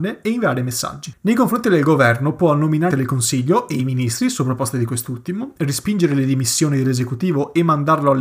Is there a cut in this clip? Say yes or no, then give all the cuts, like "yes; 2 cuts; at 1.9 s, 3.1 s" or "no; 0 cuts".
yes; 1 cut; at 2.9 s